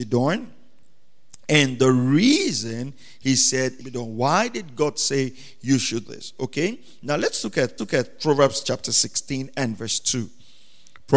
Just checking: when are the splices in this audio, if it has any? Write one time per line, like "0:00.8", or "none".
0:03.8
0:06.0
0:07.8